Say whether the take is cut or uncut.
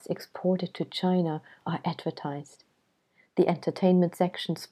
uncut